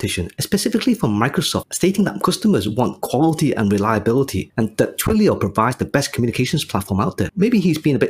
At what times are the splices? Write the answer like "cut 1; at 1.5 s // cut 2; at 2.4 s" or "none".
none

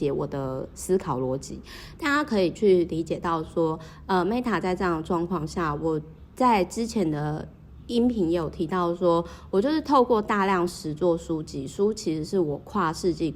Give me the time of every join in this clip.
cut 1; at 1.9 s

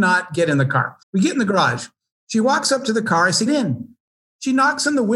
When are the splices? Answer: cut 1; at 1.0 s // cut 2; at 3.5 s

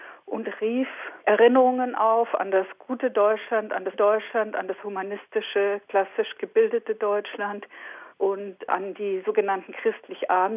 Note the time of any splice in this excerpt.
cut 1; at 1.2 s // cut 2; at 3.9 s // cut 3; at 8.1 s

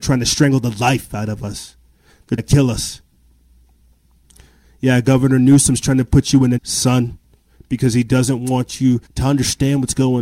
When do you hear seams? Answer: cut 1; at 2.4 s // cut 2; at 6.6 s // cut 3; at 9.1 s

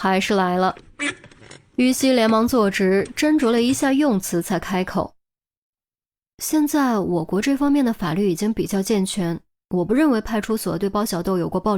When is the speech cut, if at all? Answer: none

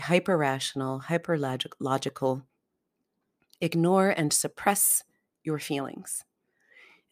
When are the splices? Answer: none

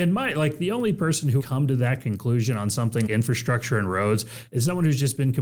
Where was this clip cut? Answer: cut 1; at 1.4 s // cut 2; at 3.1 s

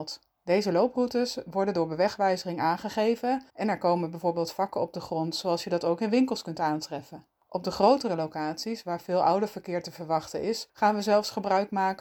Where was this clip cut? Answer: cut 1; at 3.5 s

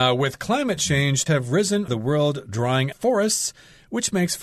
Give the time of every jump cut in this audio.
cut 1; at 1.3 s // cut 2; at 1.9 s // cut 3; at 2.9 s

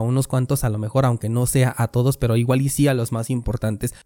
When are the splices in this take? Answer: none

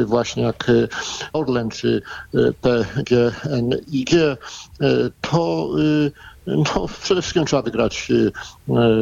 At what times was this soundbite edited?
cut 1; at 1.3 s

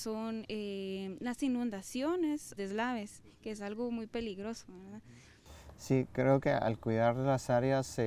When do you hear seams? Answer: cut 1; at 2.6 s

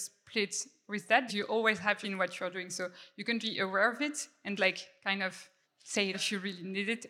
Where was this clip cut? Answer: cut 1; at 1.3 s // cut 2; at 2.0 s // cut 3; at 3.4 s // cut 4; at 4.6 s // cut 5; at 5.6 s // cut 6; at 6.1 s

